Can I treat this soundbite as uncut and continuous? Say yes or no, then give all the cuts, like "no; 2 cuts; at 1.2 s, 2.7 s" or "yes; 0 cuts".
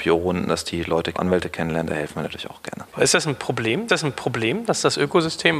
no; 3 cuts; at 1.1 s, 2.9 s, 3.9 s